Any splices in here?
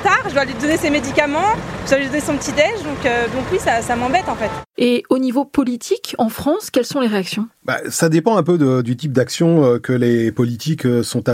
yes; 1 cut; at 4.7 s

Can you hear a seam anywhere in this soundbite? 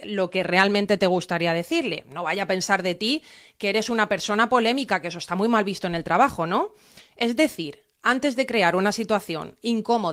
no; 0 cuts

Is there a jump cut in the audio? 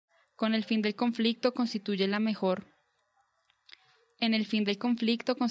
no; 0 cuts

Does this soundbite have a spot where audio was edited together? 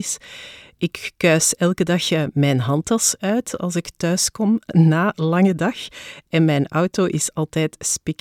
yes; 1 cut; at 5.1 s

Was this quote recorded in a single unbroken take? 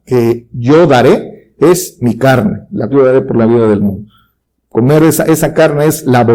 no; 1 cut; at 2.9 s

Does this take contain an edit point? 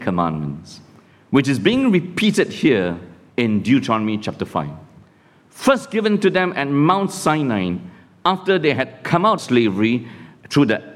yes; 1 cut; at 9.4 s

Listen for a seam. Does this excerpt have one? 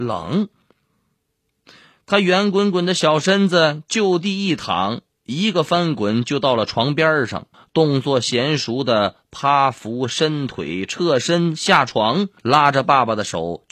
yes; 2 cuts; at 7.5 s, 12.4 s

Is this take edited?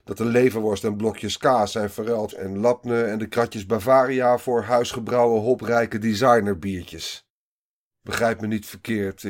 yes; 1 cut; at 2.3 s

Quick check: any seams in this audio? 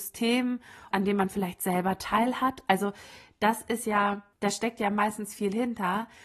yes; 2 cuts; at 0.9 s, 4.3 s

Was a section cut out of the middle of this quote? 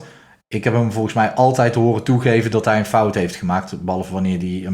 no; 0 cuts

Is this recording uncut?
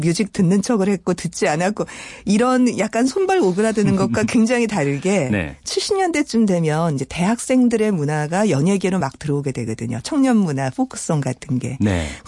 yes; 0 cuts

